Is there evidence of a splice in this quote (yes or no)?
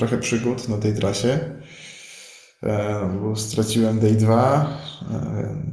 no